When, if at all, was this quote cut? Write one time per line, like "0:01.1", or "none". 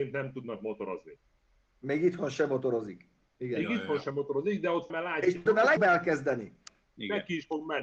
0:04.9
0:05.5
0:05.8